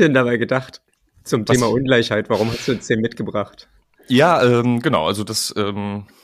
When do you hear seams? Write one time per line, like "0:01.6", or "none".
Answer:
none